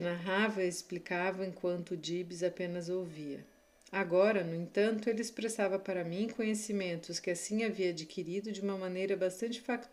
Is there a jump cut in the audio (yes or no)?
no